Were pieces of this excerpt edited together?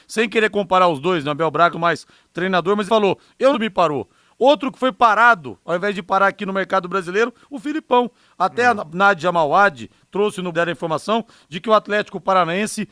yes; 4 cuts; at 1.7 s, 2.9 s, 3.5 s, 10.5 s

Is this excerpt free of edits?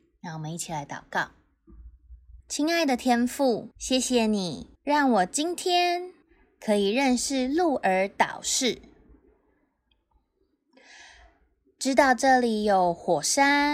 no; 4 cuts; at 2.4 s, 3.7 s, 4.8 s, 6.2 s

